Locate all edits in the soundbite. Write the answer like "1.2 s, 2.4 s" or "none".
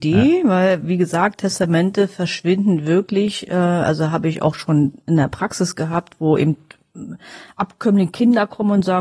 none

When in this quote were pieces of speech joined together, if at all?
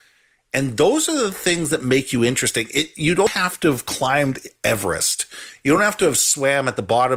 none

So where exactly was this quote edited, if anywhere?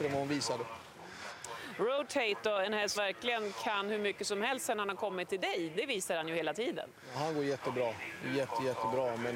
3.0 s

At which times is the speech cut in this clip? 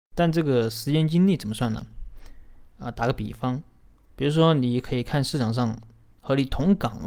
2.7 s

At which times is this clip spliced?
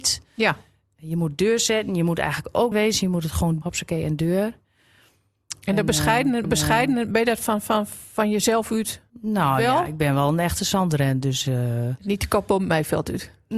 2.7 s, 3.6 s, 6.4 s, 9.1 s

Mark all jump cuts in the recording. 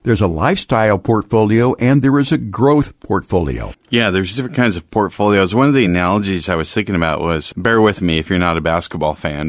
none

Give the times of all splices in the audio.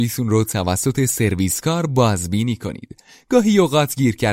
none

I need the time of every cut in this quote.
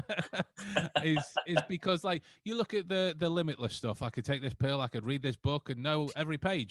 none

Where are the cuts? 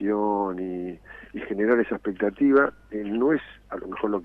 none

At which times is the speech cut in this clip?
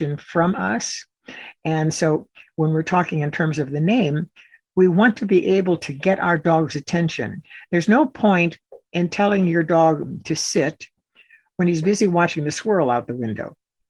none

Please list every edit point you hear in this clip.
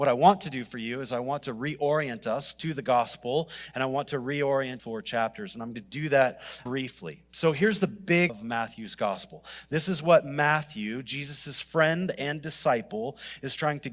4.8 s, 5.7 s, 6.7 s, 8.3 s

